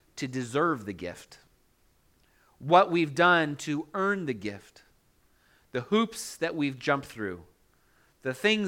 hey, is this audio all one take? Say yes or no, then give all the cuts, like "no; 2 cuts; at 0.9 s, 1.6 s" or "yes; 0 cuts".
yes; 0 cuts